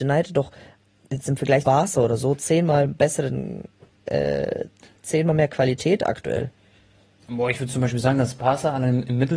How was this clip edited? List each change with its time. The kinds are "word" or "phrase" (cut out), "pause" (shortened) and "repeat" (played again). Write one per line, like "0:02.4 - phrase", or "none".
0:01.6 - word